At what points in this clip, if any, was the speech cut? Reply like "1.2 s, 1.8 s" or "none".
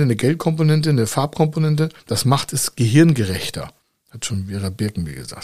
3.8 s